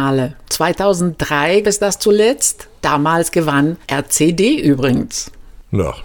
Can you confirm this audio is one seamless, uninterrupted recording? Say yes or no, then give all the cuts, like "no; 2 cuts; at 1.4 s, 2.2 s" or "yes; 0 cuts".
no; 2 cuts; at 1.6 s, 3.8 s